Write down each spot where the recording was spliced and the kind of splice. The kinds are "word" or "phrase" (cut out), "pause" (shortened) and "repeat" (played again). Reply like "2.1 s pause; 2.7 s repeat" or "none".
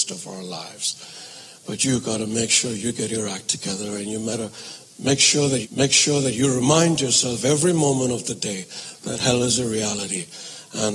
5.6 s repeat

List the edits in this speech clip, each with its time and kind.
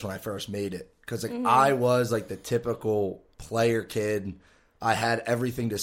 none

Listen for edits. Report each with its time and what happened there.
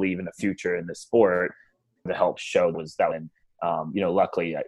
2.1 s phrase; 2.4 s word; 2.7 s phrase; 3.1 s phrase

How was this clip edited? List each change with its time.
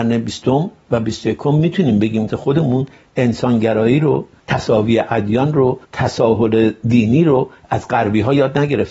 2.3 s phrase; 5.8 s pause

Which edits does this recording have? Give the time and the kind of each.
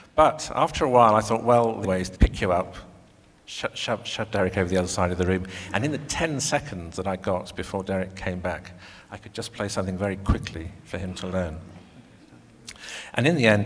1.8 s word; 2.2 s word

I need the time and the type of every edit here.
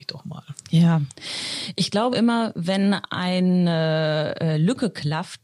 2.1 s word

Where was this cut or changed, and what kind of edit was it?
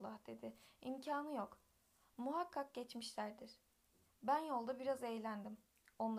none

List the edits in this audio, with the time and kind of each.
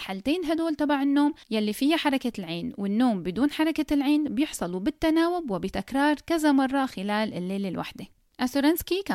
none

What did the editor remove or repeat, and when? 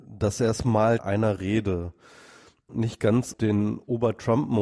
1.0 s phrase; 2.7 s word; 3.3 s word

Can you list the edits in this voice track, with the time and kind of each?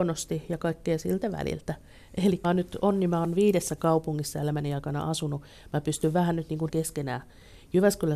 2.4 s word; 6.7 s phrase

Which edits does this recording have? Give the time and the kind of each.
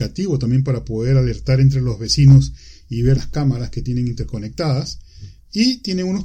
3.2 s word

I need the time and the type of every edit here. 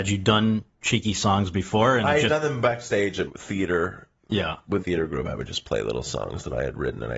3.3 s word; 4.8 s word

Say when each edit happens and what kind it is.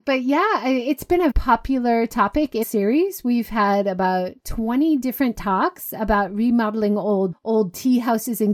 1.3 s word; 2.6 s word; 4.4 s pause; 7.3 s word

